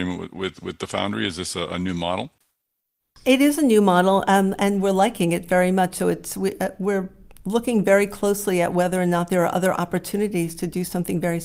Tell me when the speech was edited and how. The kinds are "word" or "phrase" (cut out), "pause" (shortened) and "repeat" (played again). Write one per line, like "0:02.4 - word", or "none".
none